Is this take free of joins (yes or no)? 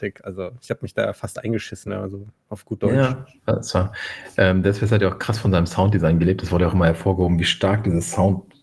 yes